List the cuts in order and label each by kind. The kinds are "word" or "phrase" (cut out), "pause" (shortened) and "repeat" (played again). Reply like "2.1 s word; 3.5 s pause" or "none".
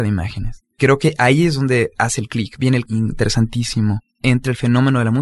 2.9 s word